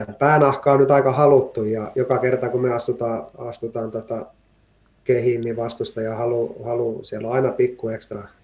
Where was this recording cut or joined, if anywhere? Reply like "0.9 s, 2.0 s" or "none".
none